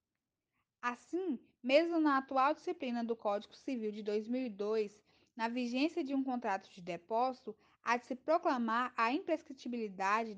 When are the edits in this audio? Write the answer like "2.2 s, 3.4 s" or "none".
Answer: none